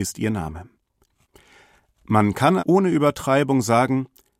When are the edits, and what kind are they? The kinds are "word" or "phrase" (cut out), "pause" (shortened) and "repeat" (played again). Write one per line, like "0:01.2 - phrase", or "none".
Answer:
0:02.6 - word